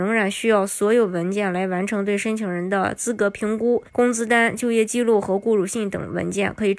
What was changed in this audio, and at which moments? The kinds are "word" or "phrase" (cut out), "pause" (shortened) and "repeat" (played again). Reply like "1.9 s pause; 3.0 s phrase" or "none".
3.9 s pause